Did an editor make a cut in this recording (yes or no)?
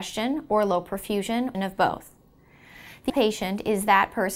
yes